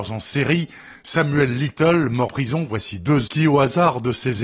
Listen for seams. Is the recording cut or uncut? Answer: cut